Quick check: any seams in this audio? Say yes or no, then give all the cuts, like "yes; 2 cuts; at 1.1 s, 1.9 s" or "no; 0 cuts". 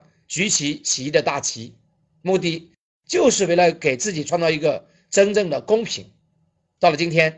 no; 0 cuts